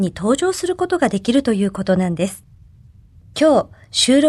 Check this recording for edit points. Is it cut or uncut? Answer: uncut